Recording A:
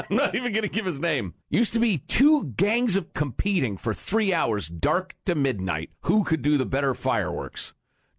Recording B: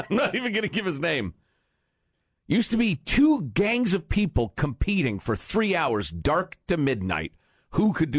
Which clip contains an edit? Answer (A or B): A